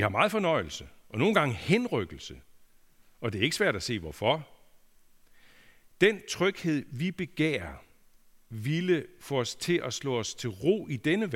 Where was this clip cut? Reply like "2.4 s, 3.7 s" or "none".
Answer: none